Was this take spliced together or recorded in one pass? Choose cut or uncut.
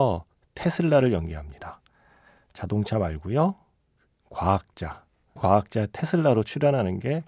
cut